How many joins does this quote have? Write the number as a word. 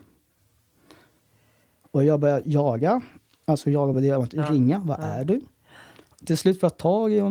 zero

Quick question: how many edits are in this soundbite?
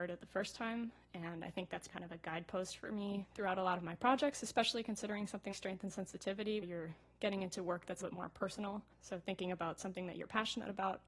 four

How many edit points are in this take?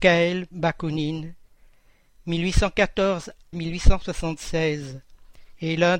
one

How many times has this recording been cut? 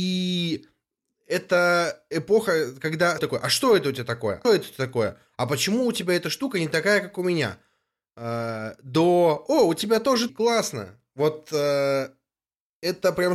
three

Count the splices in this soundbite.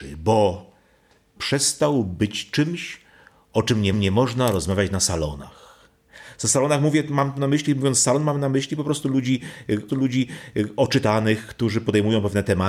three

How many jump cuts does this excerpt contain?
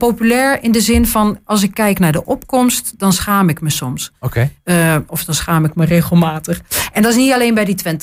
zero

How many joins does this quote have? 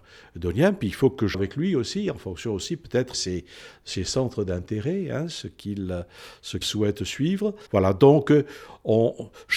four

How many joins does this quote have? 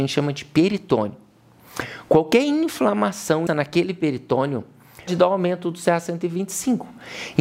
two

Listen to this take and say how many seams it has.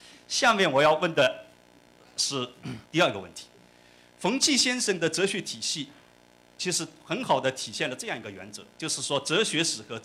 one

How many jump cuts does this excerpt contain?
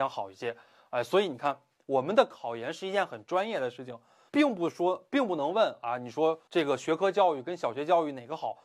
two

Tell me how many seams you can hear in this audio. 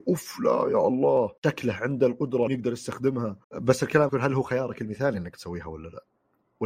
four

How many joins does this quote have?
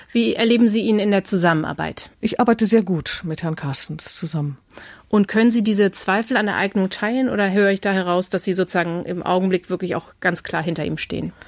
one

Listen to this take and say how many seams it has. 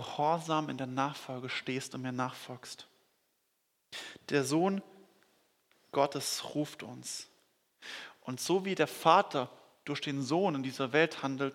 zero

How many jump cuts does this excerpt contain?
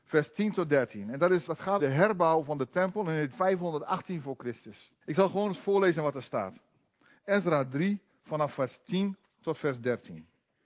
four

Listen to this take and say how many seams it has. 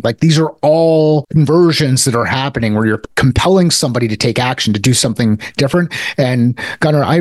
zero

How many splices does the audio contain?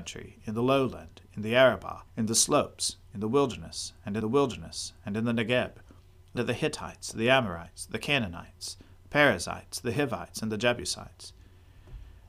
three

